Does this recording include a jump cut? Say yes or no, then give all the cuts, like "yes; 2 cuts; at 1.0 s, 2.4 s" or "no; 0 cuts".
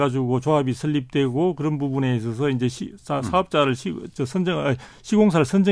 no; 0 cuts